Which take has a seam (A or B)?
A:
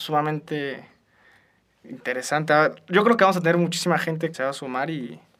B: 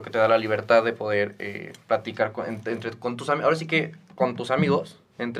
A